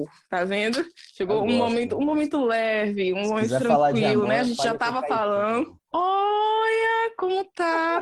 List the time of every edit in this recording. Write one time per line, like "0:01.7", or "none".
none